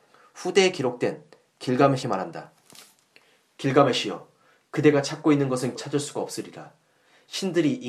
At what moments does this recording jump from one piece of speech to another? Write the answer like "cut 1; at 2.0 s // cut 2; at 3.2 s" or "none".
cut 1; at 2.0 s // cut 2; at 5.8 s